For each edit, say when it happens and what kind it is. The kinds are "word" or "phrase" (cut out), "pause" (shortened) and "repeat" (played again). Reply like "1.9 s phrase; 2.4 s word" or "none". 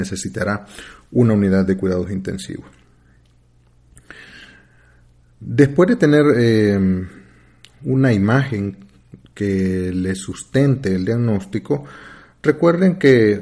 none